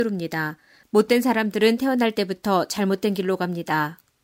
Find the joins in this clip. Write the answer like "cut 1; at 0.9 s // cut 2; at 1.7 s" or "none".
none